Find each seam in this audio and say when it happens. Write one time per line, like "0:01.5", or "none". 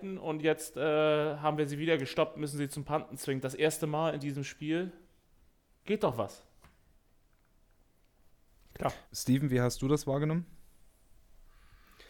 0:09.1